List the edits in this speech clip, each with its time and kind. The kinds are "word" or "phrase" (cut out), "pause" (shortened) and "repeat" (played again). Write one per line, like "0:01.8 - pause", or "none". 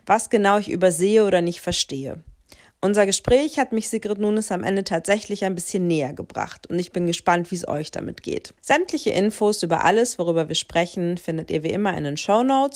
0:08.6 - pause